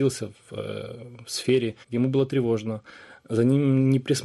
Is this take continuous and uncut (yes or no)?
no